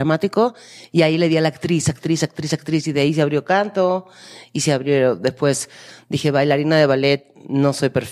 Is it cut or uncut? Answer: uncut